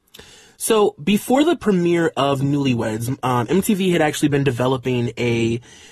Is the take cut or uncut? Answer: uncut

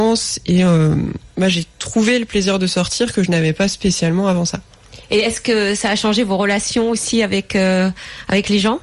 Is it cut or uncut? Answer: uncut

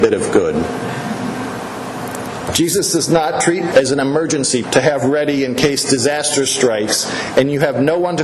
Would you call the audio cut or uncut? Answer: cut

